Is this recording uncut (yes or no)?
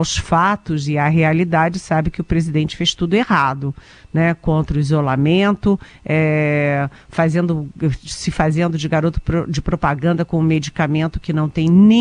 yes